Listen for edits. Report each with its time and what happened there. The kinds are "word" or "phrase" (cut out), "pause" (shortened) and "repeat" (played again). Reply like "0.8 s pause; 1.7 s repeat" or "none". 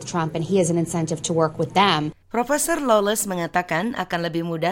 2.2 s pause